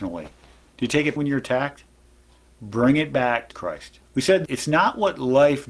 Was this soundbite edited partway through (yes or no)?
yes